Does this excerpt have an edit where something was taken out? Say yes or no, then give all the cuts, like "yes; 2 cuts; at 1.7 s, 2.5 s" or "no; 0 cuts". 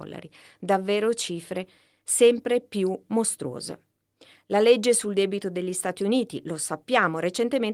no; 0 cuts